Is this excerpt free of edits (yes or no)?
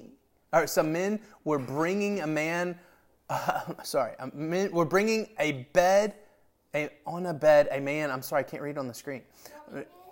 yes